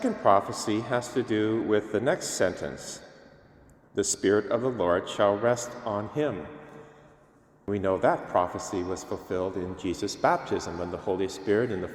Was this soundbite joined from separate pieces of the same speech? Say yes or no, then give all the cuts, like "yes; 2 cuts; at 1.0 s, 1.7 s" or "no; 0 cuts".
no; 0 cuts